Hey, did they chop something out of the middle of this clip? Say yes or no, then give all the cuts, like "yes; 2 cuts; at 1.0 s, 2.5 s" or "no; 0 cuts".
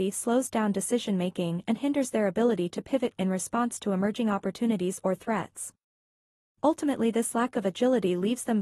yes; 1 cut; at 3.2 s